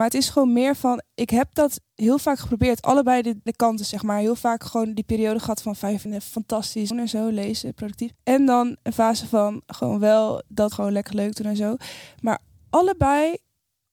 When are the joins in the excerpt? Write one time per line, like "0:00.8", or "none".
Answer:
0:03.5
0:06.1
0:06.9
0:08.1
0:10.7
0:11.1

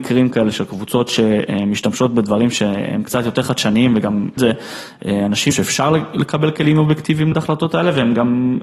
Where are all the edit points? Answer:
0:04.4
0:05.5
0:07.3

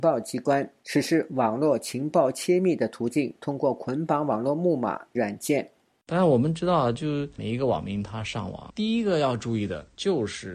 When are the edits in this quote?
0:05.1

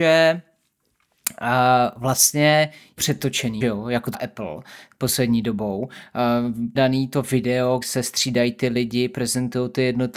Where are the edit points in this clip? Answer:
0:03.0
0:03.6
0:04.1
0:06.8
0:07.8

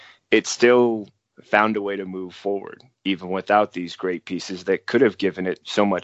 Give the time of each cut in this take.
none

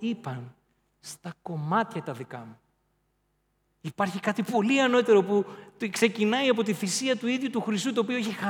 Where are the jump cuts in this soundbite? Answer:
none

